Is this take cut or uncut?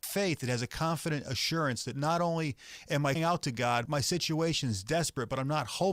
cut